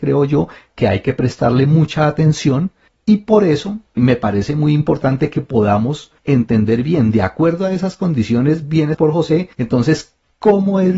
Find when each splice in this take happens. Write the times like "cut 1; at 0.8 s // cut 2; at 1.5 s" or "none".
cut 1; at 4.0 s // cut 2; at 6.2 s // cut 3; at 8.9 s // cut 4; at 9.5 s